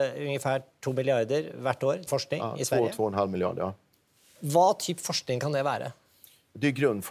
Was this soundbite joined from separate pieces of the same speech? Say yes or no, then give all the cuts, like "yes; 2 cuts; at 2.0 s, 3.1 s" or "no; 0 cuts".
yes; 1 cut; at 2.1 s